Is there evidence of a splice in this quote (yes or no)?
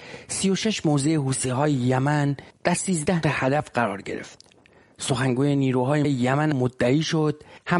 yes